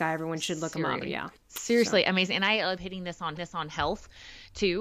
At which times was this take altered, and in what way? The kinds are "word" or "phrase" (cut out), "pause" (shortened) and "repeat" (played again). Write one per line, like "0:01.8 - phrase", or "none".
0:01.0 - word
0:01.4 - pause
0:02.8 - word
0:03.4 - repeat